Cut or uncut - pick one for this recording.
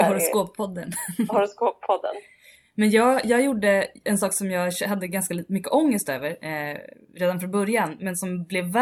uncut